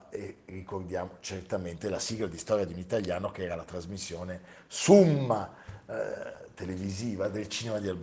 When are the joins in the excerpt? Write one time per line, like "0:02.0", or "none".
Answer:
none